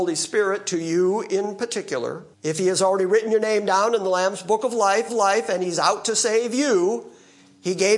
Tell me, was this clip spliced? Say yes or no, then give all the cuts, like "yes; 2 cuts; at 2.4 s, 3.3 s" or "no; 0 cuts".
yes; 2 cuts; at 2.3 s, 5.1 s